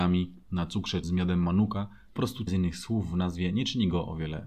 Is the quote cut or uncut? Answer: cut